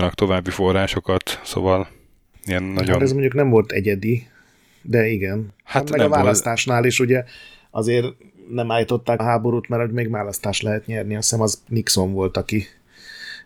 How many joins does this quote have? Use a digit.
1